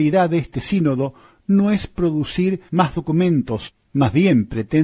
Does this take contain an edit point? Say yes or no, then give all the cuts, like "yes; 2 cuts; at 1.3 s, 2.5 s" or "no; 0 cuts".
no; 0 cuts